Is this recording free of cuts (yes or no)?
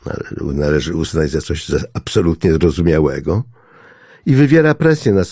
yes